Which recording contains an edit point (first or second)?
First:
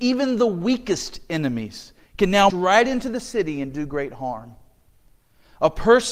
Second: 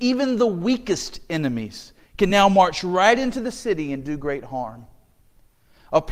first